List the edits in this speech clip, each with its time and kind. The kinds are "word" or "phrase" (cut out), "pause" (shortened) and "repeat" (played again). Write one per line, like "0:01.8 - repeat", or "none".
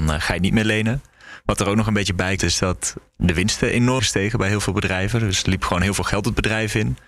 0:02.4 - word
0:04.0 - word